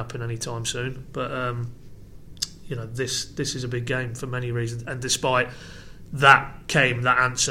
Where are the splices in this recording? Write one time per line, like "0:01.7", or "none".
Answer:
none